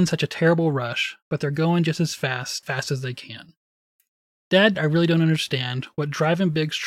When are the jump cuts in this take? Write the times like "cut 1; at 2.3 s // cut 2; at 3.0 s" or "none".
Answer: cut 1; at 2.6 s // cut 2; at 4.7 s

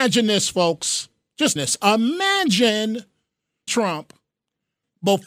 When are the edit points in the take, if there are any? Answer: cut 1; at 1.6 s // cut 2; at 3.7 s

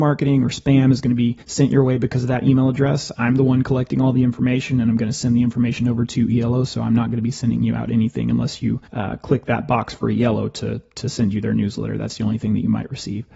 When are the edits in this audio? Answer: cut 1; at 1.4 s // cut 2; at 8.9 s

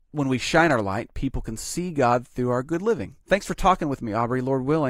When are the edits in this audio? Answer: cut 1; at 3.2 s

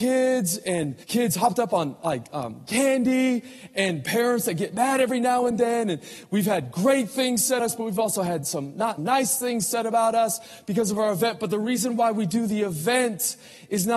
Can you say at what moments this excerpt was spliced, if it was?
cut 1; at 1.0 s // cut 2; at 7.6 s // cut 3; at 9.0 s

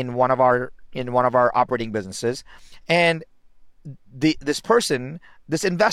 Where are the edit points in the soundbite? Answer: cut 1; at 4.0 s

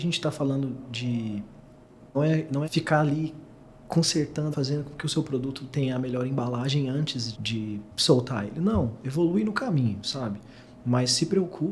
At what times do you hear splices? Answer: cut 1; at 2.1 s // cut 2; at 2.6 s // cut 3; at 4.5 s // cut 4; at 7.3 s

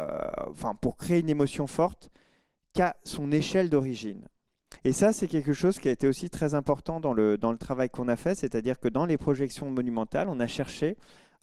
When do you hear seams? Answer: cut 1; at 4.8 s

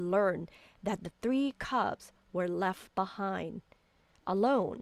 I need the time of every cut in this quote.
none

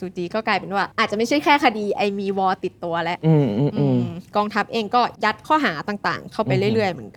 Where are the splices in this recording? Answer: cut 1; at 0.9 s // cut 2; at 5.2 s

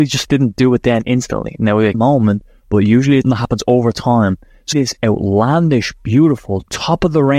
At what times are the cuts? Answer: cut 1; at 1.9 s // cut 2; at 3.2 s // cut 3; at 4.7 s

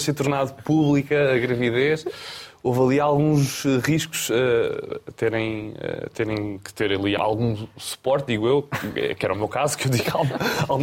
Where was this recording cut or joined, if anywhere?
cut 1; at 7.2 s

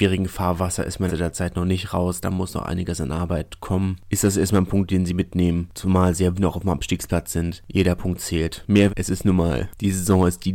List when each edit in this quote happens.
cut 1; at 1.1 s // cut 2; at 6.4 s // cut 3; at 8.9 s

